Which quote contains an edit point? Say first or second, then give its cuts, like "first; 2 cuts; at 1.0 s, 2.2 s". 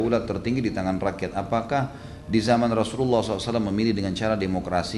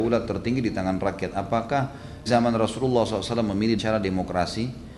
second; 2 cuts; at 2.3 s, 3.8 s